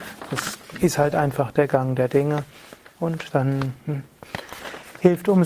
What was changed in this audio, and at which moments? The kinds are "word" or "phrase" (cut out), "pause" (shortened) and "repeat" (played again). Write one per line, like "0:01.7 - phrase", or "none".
none